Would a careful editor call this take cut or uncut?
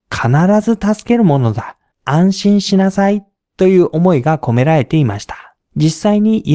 cut